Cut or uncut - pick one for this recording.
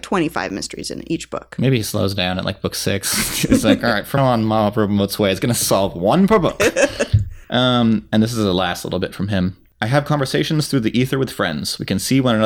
cut